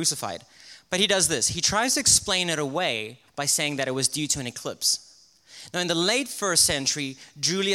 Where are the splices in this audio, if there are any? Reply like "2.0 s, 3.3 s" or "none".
3.3 s